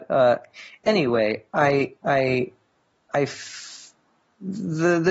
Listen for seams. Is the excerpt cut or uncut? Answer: uncut